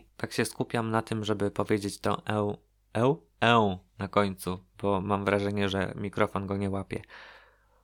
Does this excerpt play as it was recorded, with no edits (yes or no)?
yes